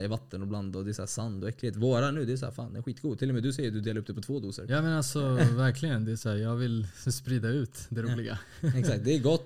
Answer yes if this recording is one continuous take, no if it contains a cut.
yes